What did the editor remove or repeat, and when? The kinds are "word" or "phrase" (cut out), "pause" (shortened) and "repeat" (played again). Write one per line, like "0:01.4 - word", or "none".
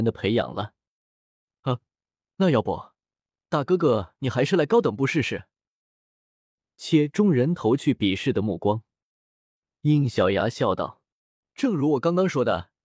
none